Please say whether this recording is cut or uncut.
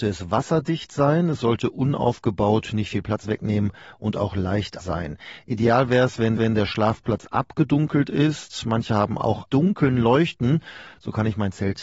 cut